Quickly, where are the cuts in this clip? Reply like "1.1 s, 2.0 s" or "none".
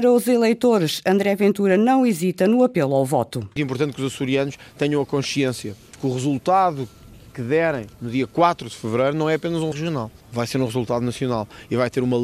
3.6 s, 7.9 s, 9.7 s